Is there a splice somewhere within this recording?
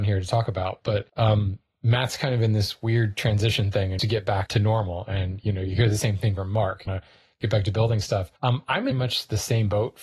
yes; 6 cuts; at 1.1 s, 4.0 s, 4.5 s, 6.9 s, 8.4 s, 8.9 s

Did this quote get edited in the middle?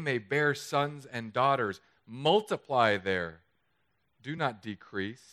no; 0 cuts

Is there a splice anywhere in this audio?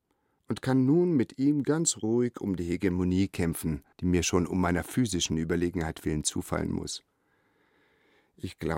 yes; 1 cut; at 3.9 s

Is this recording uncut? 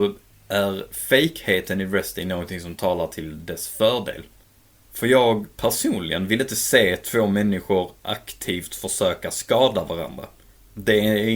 yes; 0 cuts

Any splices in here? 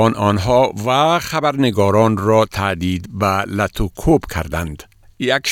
no; 0 cuts

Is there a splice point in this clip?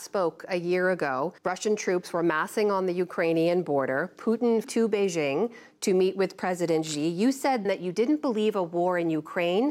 yes; 3 cuts; at 1.4 s, 4.6 s, 7.6 s

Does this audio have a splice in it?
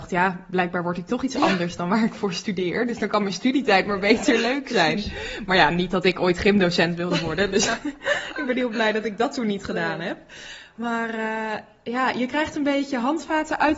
no; 0 cuts

